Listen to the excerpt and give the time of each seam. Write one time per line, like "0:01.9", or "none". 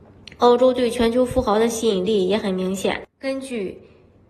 0:03.1